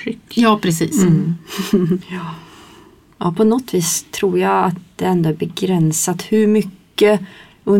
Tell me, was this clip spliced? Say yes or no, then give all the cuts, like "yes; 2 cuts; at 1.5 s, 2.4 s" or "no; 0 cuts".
no; 0 cuts